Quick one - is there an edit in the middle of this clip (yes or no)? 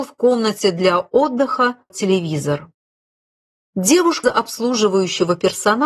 yes